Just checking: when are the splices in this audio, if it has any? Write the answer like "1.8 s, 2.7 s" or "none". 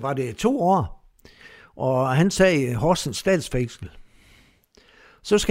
none